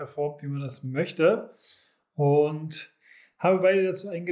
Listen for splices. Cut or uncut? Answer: uncut